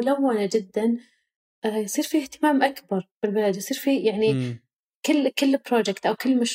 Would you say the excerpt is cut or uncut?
uncut